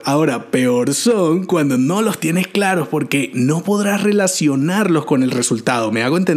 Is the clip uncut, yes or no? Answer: yes